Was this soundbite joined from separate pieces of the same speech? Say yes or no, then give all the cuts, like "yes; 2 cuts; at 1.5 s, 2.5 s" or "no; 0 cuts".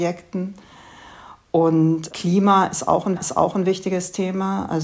yes; 1 cut; at 3.2 s